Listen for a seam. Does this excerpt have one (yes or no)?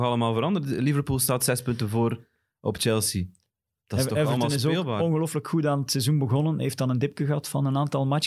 no